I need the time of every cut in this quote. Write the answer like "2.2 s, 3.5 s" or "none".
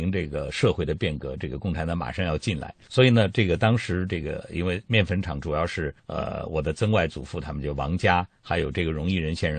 6.0 s